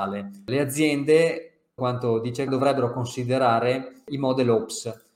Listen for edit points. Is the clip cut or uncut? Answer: cut